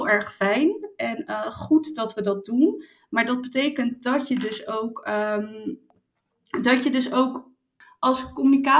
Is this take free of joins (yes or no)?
yes